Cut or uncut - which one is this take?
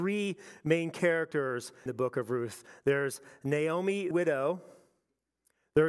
cut